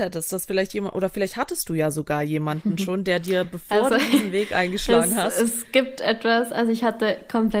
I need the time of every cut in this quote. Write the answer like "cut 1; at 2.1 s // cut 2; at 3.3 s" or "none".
none